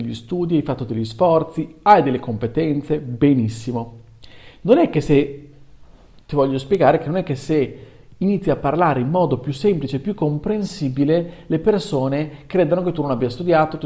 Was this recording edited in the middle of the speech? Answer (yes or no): no